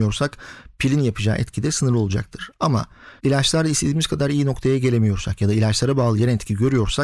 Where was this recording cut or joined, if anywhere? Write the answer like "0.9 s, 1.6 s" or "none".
3.2 s